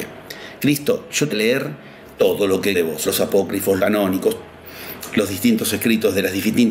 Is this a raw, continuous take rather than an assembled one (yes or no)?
no